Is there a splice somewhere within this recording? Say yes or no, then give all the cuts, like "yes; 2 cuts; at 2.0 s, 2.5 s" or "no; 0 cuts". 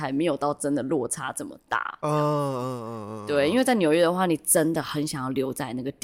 no; 0 cuts